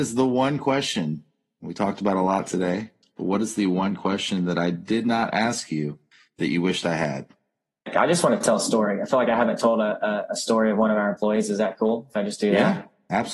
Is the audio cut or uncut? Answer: uncut